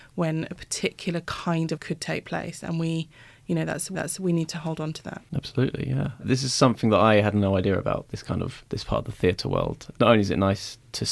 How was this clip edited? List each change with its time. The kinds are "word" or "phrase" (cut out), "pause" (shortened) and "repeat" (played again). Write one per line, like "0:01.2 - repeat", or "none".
0:01.8 - word
0:03.9 - repeat
0:08.7 - pause
0:10.0 - word